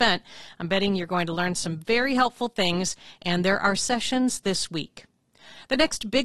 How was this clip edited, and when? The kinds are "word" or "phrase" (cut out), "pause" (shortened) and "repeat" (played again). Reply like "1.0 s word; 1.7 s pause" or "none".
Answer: none